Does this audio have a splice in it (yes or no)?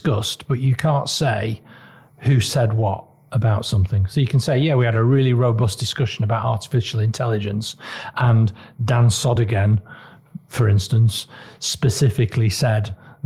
no